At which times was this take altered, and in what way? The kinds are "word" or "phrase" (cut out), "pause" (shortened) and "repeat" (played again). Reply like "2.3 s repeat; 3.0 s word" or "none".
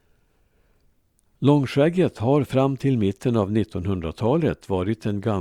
none